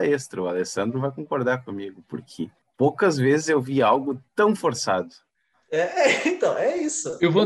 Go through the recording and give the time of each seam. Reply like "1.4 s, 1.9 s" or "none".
2.6 s, 4.3 s